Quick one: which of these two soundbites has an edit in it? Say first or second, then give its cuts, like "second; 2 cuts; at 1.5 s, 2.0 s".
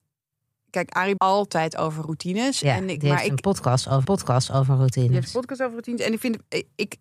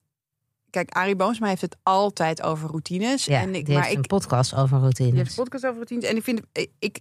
first; 2 cuts; at 1.2 s, 4.0 s